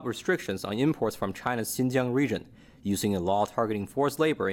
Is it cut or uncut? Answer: uncut